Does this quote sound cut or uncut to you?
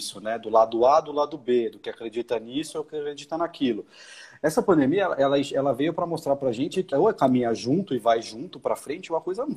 cut